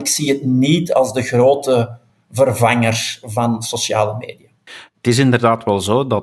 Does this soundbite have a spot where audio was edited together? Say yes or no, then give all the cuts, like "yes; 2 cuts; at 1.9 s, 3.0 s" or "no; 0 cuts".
no; 0 cuts